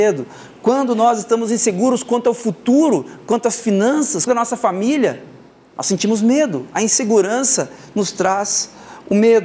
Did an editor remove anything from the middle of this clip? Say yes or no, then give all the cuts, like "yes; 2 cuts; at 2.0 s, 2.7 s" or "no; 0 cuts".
yes; 1 cut; at 4.3 s